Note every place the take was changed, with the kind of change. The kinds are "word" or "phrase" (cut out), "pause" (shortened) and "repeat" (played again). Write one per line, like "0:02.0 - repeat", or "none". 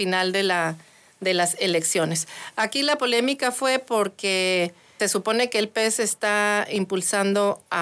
0:05.0 - word